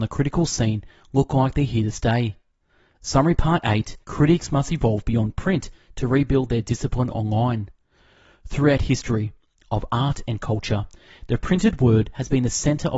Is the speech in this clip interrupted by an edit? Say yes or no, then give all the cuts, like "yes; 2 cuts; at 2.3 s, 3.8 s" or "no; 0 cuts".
yes; 1 cut; at 4.0 s